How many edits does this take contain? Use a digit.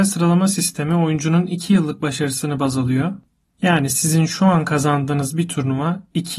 0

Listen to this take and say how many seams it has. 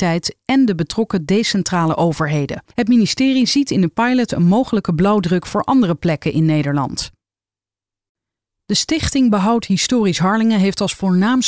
1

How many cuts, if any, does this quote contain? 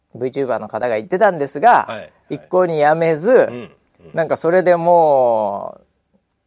0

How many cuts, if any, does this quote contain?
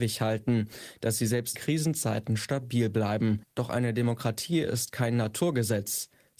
1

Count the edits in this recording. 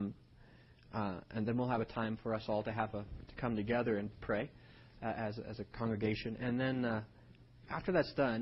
0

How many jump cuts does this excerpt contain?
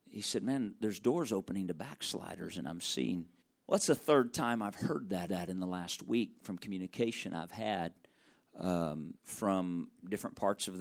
3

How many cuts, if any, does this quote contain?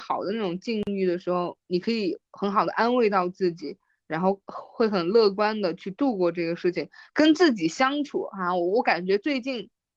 0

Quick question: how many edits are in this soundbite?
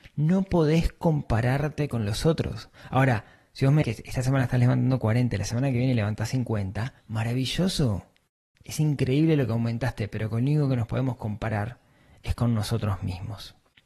2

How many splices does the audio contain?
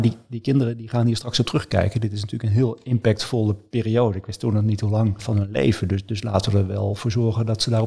1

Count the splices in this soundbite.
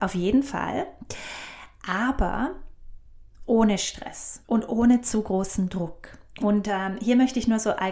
1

